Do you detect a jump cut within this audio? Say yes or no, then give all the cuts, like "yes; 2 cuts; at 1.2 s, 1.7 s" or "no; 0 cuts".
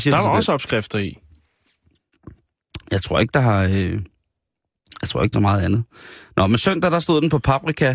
yes; 1 cut; at 5.3 s